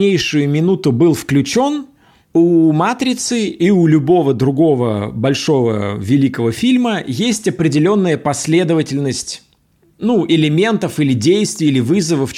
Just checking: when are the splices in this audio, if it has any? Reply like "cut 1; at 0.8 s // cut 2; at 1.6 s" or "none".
none